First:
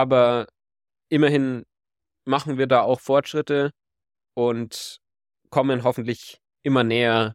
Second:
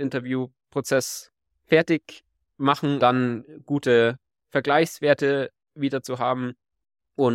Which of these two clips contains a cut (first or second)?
second